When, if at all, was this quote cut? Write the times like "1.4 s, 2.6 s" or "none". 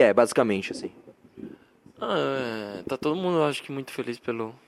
none